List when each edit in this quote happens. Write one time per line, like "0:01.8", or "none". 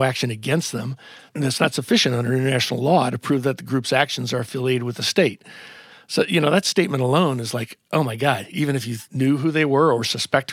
none